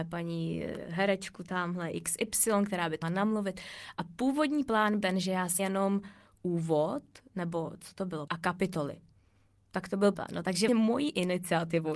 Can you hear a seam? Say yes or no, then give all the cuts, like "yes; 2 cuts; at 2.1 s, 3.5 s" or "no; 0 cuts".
yes; 6 cuts; at 3.0 s, 5.0 s, 5.6 s, 8.3 s, 10.1 s, 10.7 s